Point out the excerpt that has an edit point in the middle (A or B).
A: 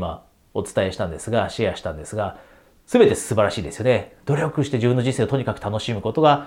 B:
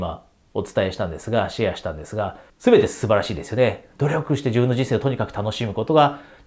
B